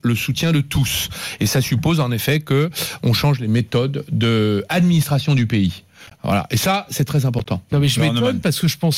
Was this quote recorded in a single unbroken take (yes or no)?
yes